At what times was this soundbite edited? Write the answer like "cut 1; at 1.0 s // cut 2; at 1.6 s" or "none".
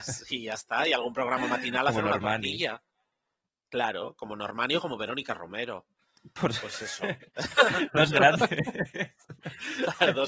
none